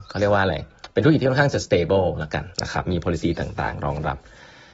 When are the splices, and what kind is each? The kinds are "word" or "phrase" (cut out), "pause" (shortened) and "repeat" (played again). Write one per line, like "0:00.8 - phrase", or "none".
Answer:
0:02.5 - pause